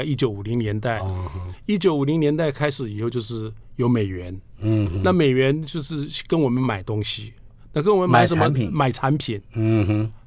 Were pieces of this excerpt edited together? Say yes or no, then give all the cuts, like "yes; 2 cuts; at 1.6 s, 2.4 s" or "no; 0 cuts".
no; 0 cuts